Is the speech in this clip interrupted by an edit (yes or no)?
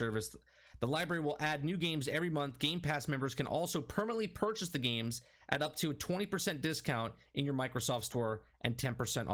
no